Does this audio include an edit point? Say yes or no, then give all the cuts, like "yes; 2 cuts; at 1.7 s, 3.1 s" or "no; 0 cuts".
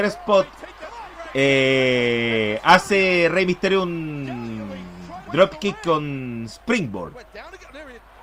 yes; 1 cut; at 5.3 s